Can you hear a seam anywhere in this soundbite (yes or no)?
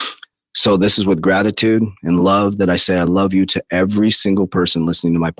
no